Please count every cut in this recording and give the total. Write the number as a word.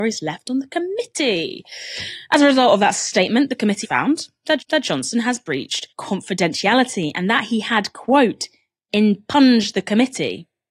three